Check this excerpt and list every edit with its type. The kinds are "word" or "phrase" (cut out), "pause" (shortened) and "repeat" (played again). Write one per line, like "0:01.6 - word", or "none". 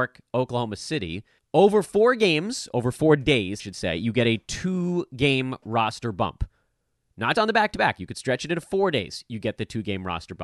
0:01.4 - pause
0:03.6 - word
0:07.3 - word